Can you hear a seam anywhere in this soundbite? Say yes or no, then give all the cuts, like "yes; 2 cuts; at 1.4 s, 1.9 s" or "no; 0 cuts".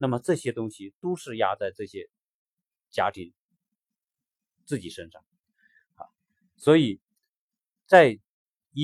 no; 0 cuts